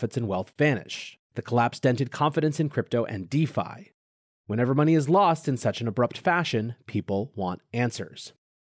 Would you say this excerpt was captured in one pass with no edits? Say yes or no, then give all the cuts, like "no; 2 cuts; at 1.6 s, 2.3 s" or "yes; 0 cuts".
no; 1 cut; at 1.2 s